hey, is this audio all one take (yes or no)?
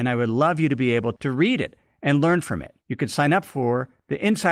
no